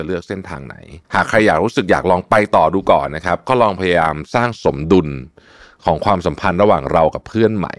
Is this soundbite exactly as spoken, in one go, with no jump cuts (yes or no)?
no